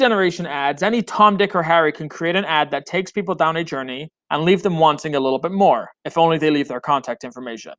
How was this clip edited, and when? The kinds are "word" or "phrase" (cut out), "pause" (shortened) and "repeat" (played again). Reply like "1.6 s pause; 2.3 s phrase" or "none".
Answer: 5.9 s pause